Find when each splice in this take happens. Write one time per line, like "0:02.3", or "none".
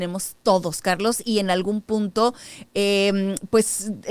none